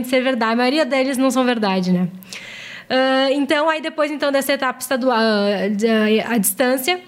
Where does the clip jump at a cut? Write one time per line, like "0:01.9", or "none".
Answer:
none